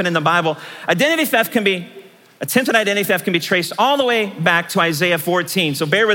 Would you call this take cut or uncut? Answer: uncut